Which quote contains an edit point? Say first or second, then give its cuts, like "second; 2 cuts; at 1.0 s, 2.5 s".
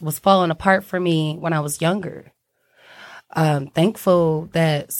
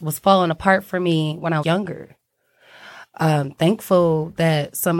second; 1 cut; at 1.6 s